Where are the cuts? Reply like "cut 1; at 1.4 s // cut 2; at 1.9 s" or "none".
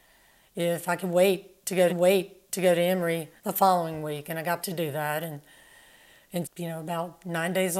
cut 1; at 1.9 s // cut 2; at 3.4 s // cut 3; at 4.6 s // cut 4; at 6.4 s